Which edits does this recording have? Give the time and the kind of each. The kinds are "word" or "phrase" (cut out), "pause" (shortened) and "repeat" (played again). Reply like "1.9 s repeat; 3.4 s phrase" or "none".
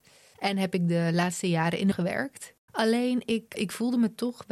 1.9 s word; 3.5 s word